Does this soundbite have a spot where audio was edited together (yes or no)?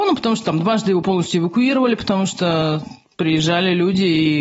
no